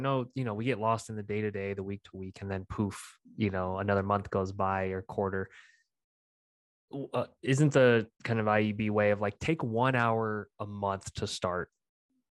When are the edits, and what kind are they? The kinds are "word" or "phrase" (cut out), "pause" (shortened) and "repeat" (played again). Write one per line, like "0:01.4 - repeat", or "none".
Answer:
0:08.1 - pause